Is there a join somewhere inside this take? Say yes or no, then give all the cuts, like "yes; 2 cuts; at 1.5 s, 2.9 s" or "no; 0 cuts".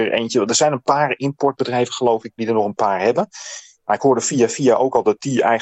no; 0 cuts